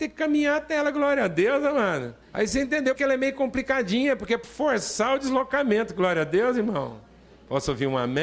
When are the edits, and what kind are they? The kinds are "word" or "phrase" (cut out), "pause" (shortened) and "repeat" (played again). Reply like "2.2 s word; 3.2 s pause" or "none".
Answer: 2.2 s pause; 3.0 s word; 4.4 s word

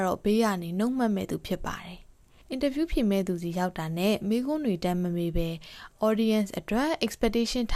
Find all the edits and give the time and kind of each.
none

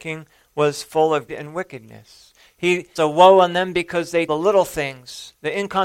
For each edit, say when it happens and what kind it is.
1.3 s word; 3.0 s word; 4.3 s phrase

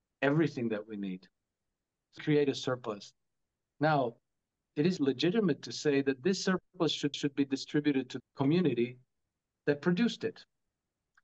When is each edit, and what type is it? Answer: 2.2 s word; 5.0 s word; 7.1 s repeat; 8.2 s phrase

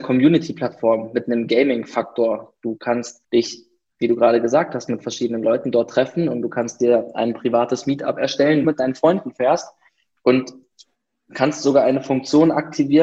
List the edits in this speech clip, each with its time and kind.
3.2 s pause; 8.6 s phrase

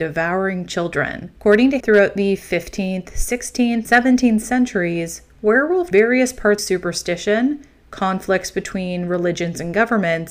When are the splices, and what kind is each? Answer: 1.4 s pause; 1.8 s word; 3.8 s word; 5.9 s phrase; 6.6 s phrase

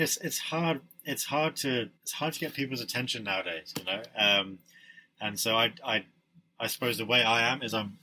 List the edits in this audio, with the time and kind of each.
2.0 s pause

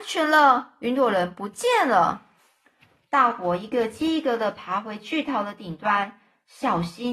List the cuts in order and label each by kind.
2.4 s pause

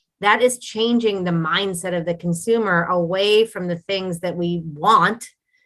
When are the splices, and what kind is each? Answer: none

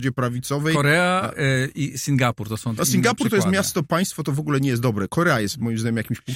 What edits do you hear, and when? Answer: 2.8 s word

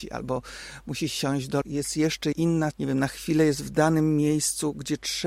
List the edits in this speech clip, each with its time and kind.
1.6 s phrase; 2.3 s word; 2.7 s word

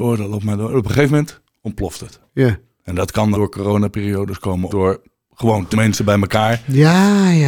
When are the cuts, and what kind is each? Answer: 3.3 s word; 4.7 s word; 5.7 s word

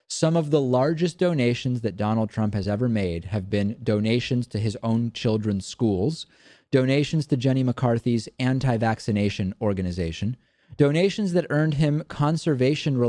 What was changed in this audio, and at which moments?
none

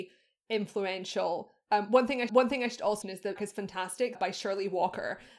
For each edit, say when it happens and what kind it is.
2.3 s repeat; 3.0 s word; 3.4 s word; 4.1 s phrase

